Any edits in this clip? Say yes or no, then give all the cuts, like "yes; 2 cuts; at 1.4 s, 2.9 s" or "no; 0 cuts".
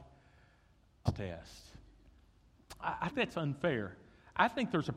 yes; 2 cuts; at 1.1 s, 3.1 s